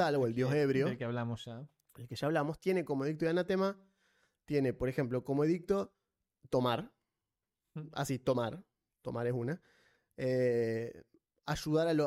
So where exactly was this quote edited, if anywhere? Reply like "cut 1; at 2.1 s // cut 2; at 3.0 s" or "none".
none